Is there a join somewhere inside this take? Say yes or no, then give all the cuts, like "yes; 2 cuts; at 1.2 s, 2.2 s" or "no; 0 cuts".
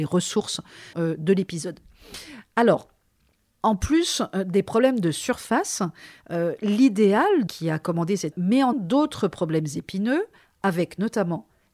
yes; 4 cuts; at 0.9 s, 7.5 s, 8.3 s, 8.7 s